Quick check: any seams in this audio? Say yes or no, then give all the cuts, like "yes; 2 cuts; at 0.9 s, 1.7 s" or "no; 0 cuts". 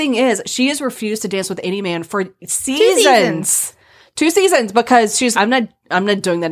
yes; 1 cut; at 5.3 s